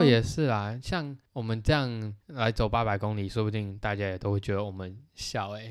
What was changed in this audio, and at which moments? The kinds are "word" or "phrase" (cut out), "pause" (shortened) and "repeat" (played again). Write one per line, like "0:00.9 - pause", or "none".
0:01.3 - pause
0:02.2 - pause